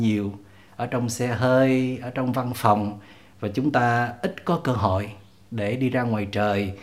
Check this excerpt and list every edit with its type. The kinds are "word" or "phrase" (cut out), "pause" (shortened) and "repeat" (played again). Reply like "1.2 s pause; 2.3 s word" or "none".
none